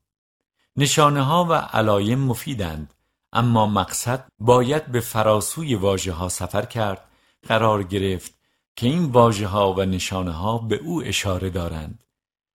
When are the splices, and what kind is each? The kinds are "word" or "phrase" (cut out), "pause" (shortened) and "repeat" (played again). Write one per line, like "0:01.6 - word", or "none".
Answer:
0:04.3 - word
0:07.4 - phrase